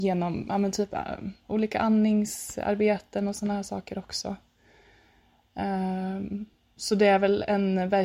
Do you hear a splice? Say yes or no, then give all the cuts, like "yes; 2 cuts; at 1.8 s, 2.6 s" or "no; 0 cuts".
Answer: no; 0 cuts